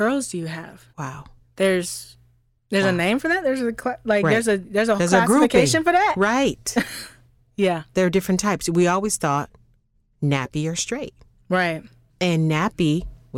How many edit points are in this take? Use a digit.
2